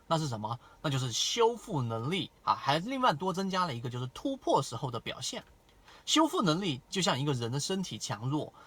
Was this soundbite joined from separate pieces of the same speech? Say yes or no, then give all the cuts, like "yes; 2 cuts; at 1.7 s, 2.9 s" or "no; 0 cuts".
yes; 1 cut; at 2.4 s